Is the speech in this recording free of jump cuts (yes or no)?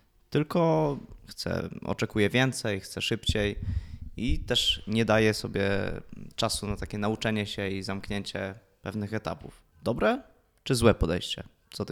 no